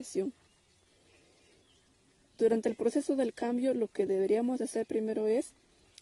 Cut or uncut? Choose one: uncut